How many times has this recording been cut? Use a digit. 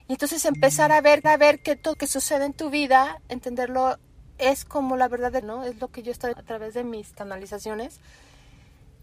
6